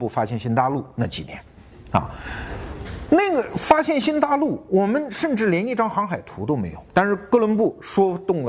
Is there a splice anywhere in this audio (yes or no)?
yes